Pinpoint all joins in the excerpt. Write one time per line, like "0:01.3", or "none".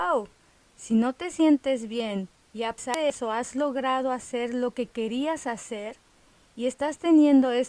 none